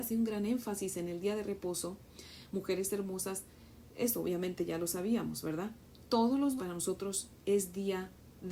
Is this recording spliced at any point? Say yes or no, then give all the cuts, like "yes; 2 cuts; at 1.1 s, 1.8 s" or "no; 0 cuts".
yes; 1 cut; at 6.6 s